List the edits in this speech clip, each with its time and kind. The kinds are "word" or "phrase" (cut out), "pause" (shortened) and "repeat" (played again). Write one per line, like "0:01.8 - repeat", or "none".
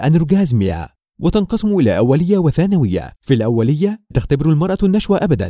0:03.1 - pause
0:04.1 - word